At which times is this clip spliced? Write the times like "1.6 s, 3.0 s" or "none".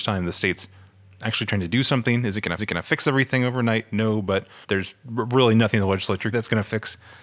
2.6 s, 4.6 s, 6.3 s